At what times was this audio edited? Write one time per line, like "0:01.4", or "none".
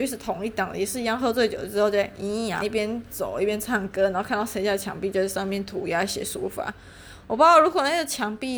0:02.6